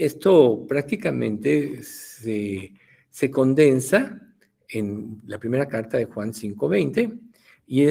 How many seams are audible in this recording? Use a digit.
0